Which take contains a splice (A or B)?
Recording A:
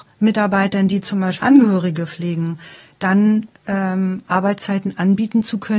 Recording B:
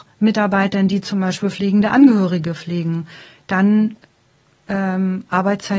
A